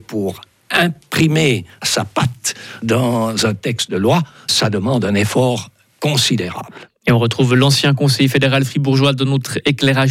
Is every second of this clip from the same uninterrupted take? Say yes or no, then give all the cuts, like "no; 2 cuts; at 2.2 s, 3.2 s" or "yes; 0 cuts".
yes; 0 cuts